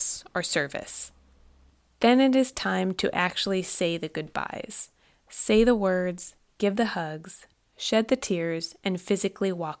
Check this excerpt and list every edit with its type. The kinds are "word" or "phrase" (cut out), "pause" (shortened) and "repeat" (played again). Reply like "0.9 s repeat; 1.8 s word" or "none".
none